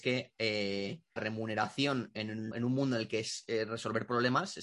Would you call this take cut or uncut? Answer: cut